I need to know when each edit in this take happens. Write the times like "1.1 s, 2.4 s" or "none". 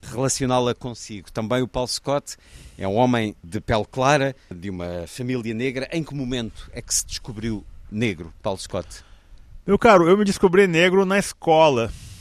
none